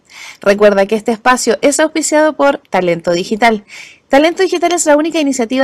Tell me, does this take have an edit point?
no; 0 cuts

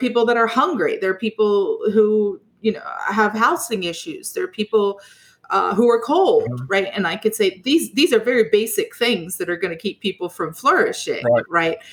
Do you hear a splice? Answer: no; 0 cuts

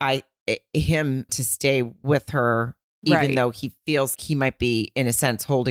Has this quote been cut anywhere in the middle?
yes; 3 cuts; at 1.3 s, 2.8 s, 4.1 s

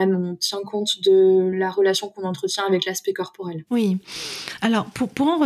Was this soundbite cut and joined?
no; 0 cuts

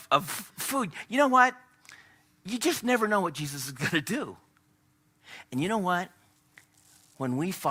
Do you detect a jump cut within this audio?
no; 0 cuts

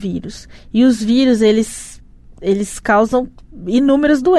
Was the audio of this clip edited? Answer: no; 0 cuts

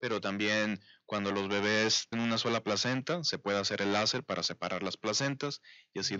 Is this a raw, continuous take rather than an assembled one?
no; 1 cut; at 2.1 s

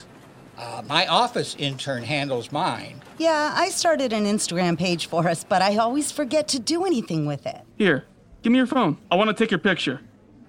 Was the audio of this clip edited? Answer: yes; 3 cuts; at 3.1 s, 7.7 s, 9.0 s

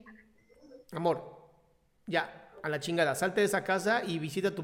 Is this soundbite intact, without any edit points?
yes; 0 cuts

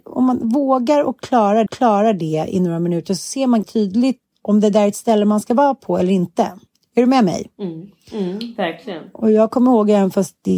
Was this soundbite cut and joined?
yes; 4 cuts; at 1.7 s, 3.6 s, 4.3 s, 6.7 s

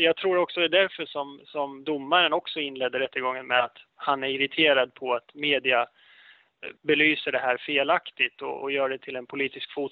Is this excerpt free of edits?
no; 1 cut; at 6.8 s

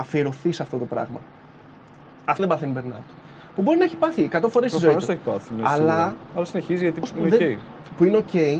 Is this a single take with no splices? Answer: no; 2 cuts; at 2.4 s, 7.0 s

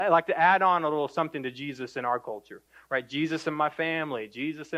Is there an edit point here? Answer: no; 0 cuts

